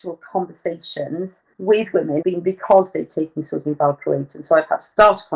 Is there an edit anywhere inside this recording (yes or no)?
yes